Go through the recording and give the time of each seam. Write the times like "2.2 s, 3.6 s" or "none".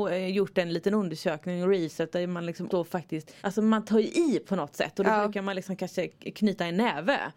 2.7 s, 3.4 s